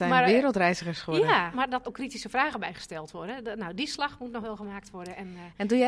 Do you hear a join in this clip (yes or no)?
yes